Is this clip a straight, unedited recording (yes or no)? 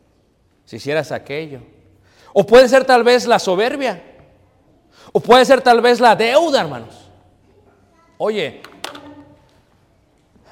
yes